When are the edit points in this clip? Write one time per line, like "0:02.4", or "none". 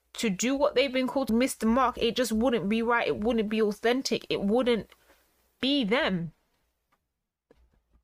0:01.3